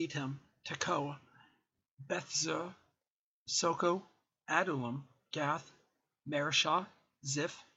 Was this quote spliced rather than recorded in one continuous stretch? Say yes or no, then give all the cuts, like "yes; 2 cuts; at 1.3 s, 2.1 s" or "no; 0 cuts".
no; 0 cuts